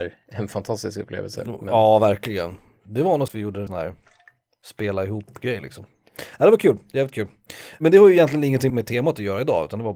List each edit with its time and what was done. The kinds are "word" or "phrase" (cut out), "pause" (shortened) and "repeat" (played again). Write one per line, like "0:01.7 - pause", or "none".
0:03.3 - word
0:03.7 - word
0:08.7 - word